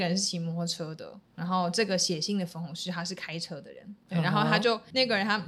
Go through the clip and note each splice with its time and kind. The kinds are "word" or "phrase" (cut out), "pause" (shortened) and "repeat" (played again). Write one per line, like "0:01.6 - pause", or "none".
0:04.0 - pause